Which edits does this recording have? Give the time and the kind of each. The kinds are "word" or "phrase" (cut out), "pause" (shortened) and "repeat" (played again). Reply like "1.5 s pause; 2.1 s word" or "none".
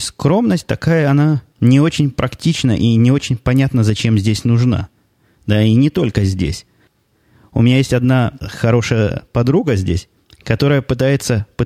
none